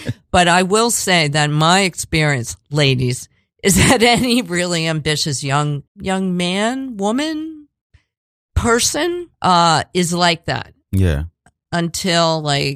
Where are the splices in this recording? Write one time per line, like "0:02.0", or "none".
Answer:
0:05.9
0:09.3